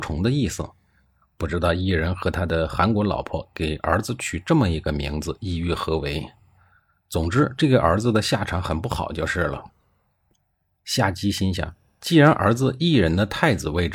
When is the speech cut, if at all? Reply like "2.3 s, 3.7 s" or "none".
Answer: none